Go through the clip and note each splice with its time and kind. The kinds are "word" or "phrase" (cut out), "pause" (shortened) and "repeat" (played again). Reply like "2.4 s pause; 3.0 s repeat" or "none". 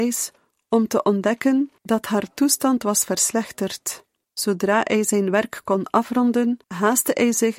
1.8 s pause; 4.2 s pause; 6.6 s pause